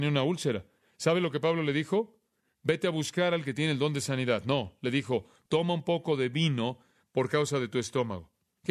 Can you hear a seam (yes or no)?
no